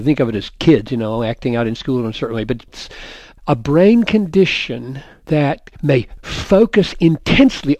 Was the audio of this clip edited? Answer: no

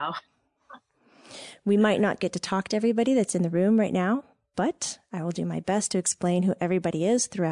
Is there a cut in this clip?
no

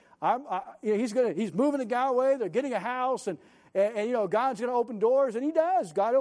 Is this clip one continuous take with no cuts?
yes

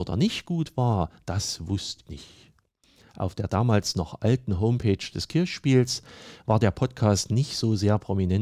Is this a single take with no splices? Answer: no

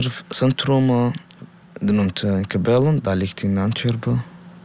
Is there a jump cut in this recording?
no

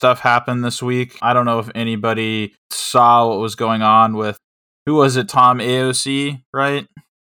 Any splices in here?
no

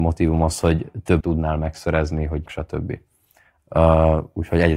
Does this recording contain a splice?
yes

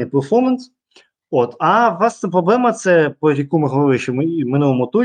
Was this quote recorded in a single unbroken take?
yes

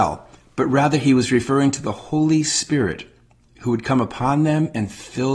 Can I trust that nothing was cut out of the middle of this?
yes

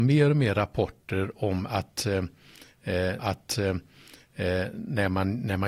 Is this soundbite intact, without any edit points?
no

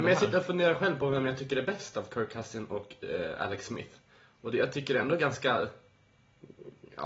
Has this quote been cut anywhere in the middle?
no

